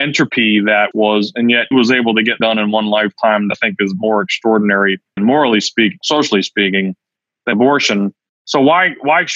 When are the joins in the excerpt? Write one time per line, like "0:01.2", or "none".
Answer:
0:00.9
0:01.7
0:02.4
0:03.5
0:05.2
0:06.0
0:07.5